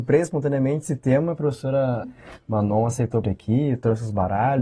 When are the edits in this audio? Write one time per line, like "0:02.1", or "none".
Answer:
0:02.0
0:03.2